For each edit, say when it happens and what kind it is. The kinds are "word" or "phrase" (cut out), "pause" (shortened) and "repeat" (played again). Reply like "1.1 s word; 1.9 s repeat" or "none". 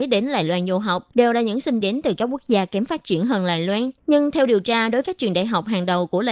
1.1 s pause; 1.8 s word; 4.0 s pause; 5.0 s word